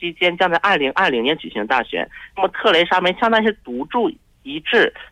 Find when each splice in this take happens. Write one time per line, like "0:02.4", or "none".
none